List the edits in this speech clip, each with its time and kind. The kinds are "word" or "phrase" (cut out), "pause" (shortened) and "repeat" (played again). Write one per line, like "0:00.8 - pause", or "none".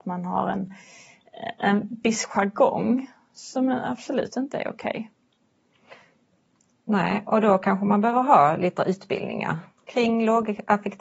0:08.8 - word